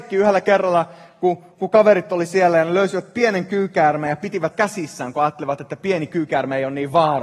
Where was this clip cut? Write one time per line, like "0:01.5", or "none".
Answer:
0:04.5